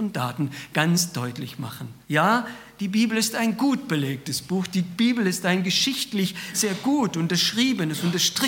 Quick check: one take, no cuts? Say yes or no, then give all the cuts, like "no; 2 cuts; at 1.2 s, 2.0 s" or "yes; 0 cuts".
no; 1 cut; at 2.0 s